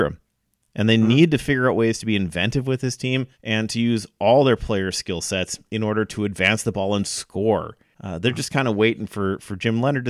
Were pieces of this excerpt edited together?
yes; 1 cut; at 3.3 s

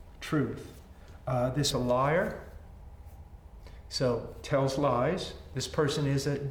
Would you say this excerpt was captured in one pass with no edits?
no; 1 cut; at 1.7 s

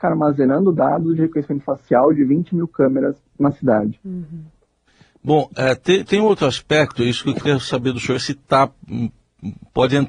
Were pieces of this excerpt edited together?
no; 0 cuts

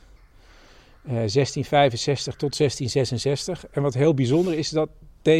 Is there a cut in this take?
no; 0 cuts

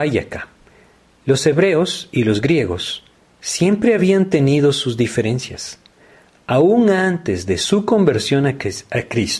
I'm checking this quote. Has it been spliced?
no; 0 cuts

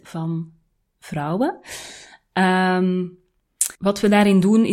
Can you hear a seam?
yes; 1 cut; at 3.7 s

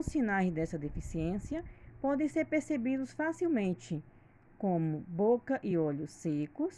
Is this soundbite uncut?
yes; 0 cuts

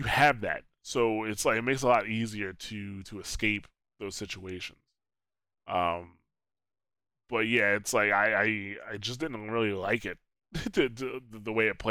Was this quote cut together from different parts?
no; 0 cuts

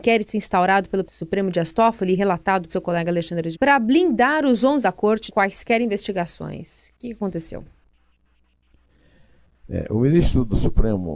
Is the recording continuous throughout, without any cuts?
no; 5 cuts; at 1.0 s, 2.7 s, 3.5 s, 4.8 s, 5.3 s

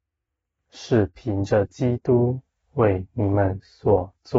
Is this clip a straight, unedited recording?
yes; 0 cuts

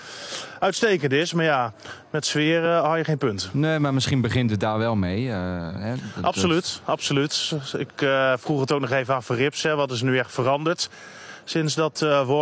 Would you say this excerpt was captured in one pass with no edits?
yes; 0 cuts

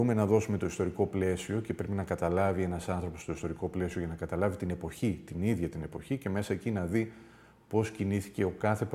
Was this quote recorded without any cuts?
yes; 0 cuts

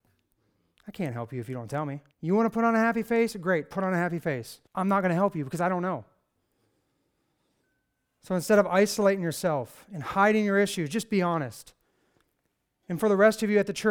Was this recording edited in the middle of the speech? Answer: yes; 2 cuts; at 2.1 s, 4.7 s

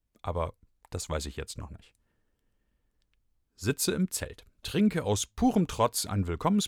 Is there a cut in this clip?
yes; 1 cut; at 4.6 s

